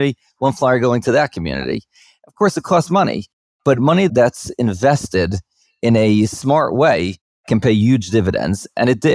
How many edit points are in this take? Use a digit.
1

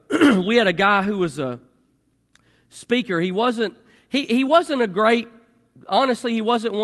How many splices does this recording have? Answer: 0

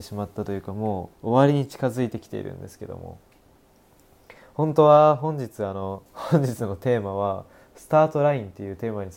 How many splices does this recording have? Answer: 2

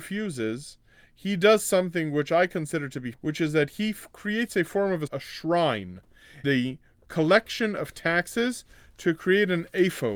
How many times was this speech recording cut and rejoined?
3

